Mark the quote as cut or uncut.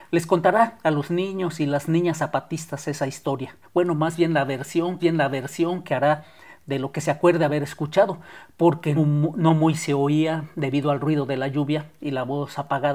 cut